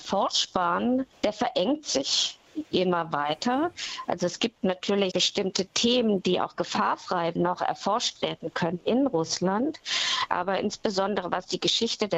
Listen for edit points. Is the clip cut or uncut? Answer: cut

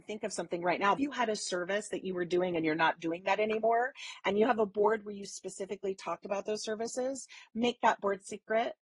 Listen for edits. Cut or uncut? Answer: cut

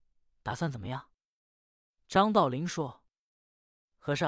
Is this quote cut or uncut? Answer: uncut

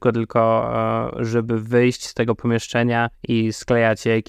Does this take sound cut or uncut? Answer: cut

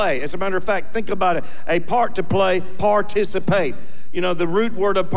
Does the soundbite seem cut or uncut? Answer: uncut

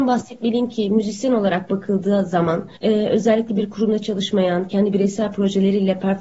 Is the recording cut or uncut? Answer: cut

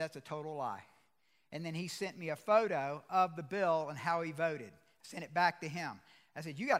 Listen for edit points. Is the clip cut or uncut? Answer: uncut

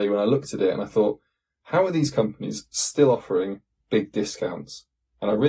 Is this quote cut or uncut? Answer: uncut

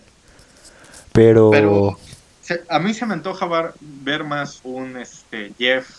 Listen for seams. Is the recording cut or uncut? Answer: cut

